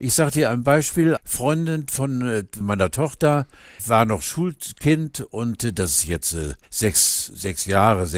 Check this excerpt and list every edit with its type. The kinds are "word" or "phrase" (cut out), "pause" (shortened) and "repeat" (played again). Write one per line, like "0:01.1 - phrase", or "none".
0:01.2 - word
0:02.6 - word
0:03.8 - word
0:06.6 - pause